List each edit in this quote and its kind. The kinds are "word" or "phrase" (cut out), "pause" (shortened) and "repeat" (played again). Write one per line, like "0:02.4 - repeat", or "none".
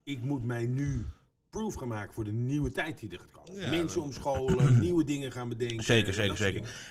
0:01.4 - pause